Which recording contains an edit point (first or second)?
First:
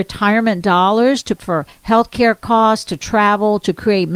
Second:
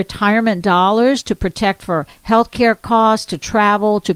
first